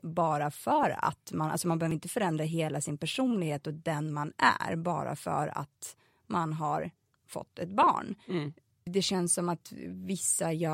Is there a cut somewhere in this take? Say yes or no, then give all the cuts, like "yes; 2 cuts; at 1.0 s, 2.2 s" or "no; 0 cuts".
no; 0 cuts